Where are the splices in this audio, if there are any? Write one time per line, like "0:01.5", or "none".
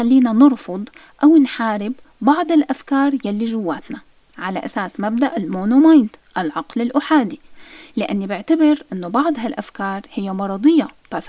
none